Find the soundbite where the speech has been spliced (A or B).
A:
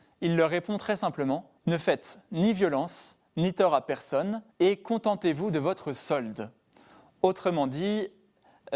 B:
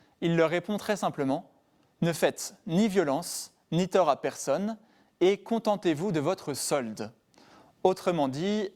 A